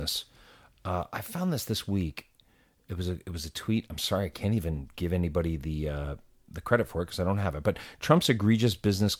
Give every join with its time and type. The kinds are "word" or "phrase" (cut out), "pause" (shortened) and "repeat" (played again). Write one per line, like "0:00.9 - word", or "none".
none